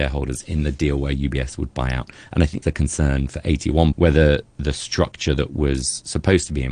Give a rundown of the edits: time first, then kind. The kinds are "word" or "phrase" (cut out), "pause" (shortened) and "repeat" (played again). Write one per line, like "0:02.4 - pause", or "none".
0:02.6 - word
0:03.9 - word
0:04.4 - word